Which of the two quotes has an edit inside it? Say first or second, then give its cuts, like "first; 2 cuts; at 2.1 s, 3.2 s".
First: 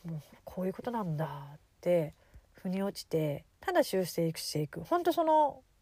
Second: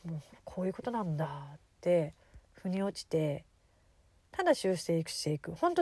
first; 1 cut; at 3.5 s